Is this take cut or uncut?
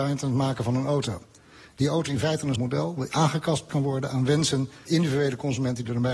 cut